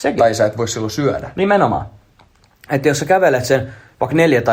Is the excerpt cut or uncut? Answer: uncut